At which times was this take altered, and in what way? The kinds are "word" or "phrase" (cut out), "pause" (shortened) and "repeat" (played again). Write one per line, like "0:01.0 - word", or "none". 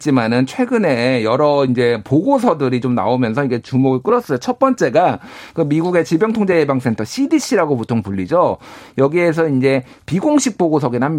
none